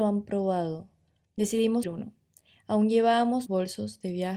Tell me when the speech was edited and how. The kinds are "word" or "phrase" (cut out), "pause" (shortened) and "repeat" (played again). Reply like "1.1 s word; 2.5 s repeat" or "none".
1.8 s word; 3.5 s word